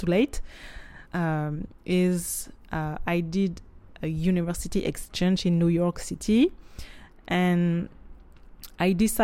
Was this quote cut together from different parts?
yes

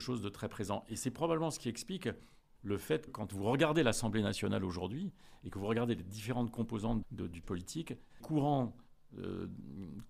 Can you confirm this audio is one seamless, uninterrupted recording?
no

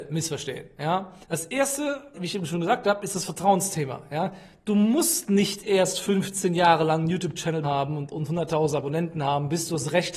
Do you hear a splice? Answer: yes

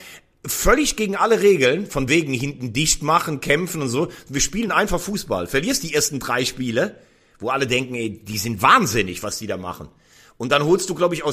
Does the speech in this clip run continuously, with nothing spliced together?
yes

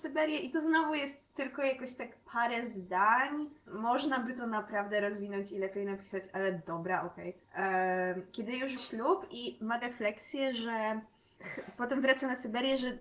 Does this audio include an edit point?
yes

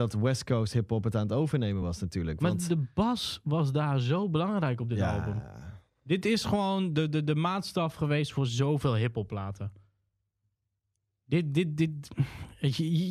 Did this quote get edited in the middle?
no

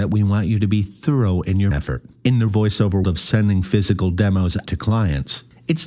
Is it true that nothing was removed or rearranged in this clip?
no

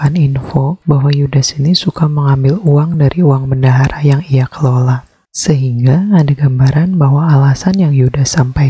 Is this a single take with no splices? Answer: yes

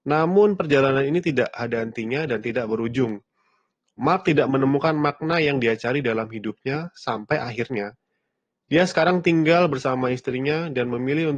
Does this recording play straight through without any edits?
yes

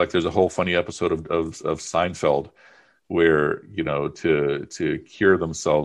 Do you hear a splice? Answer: no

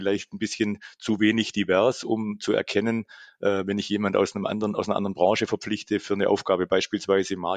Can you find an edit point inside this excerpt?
no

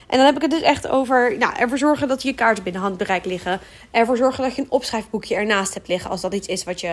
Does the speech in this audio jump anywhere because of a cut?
no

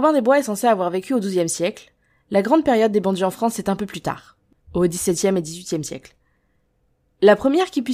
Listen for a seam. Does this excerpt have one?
no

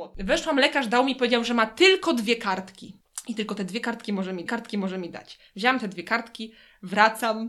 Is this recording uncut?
no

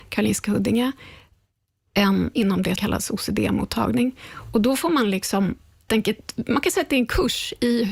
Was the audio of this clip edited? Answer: yes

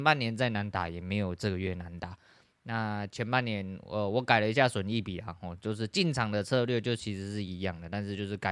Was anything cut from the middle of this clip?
no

